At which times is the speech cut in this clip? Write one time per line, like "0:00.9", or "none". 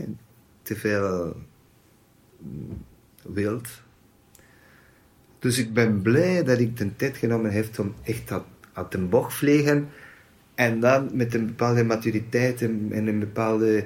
none